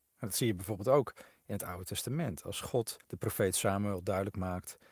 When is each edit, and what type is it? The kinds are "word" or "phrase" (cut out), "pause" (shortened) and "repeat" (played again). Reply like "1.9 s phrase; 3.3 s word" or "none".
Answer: 3.0 s pause